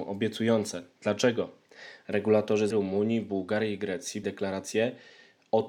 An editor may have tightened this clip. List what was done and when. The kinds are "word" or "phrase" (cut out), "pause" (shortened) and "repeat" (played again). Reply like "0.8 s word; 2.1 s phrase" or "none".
2.7 s phrase; 4.2 s word